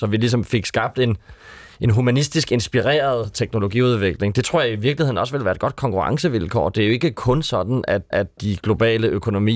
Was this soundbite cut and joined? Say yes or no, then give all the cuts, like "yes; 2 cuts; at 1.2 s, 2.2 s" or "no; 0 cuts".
yes; 1 cut; at 8.1 s